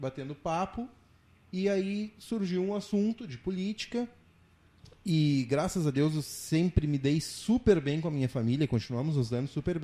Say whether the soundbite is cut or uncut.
uncut